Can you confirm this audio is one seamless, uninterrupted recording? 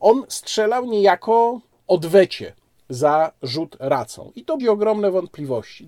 no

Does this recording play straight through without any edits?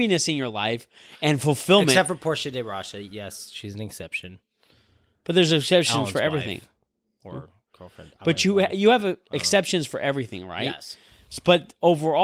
yes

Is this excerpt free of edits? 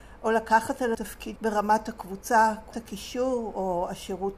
no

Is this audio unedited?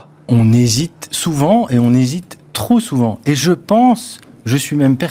yes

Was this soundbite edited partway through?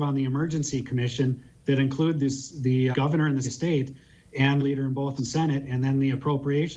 yes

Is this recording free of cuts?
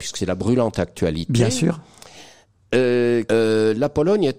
no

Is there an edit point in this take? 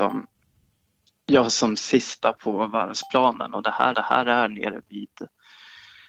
yes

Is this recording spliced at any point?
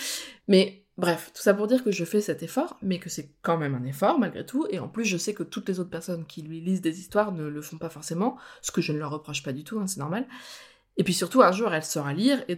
no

